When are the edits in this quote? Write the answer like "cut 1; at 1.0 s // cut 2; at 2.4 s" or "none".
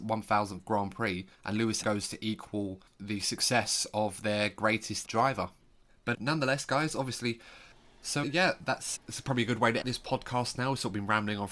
cut 1; at 1.3 s // cut 2; at 1.8 s // cut 3; at 5.0 s // cut 4; at 6.1 s // cut 5; at 8.2 s // cut 6; at 9.0 s // cut 7; at 9.8 s